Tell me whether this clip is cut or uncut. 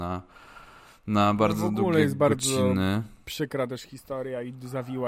uncut